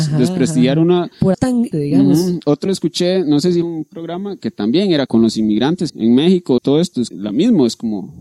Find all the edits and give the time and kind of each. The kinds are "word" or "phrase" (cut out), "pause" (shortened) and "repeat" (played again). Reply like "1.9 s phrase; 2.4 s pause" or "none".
1.3 s word; 1.7 s word; 2.7 s word; 3.6 s word; 5.1 s word; 5.9 s word; 6.6 s word; 7.1 s word